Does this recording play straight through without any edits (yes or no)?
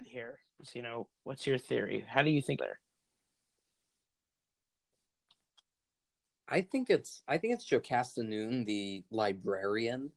no